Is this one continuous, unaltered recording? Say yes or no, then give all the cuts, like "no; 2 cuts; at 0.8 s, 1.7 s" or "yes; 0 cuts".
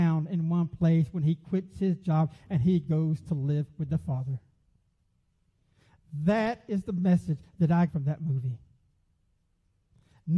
no; 1 cut; at 7.9 s